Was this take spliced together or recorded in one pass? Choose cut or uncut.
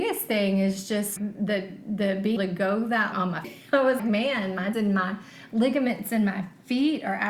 cut